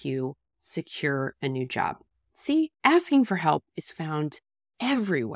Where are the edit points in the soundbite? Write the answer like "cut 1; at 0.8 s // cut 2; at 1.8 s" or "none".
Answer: cut 1; at 2.7 s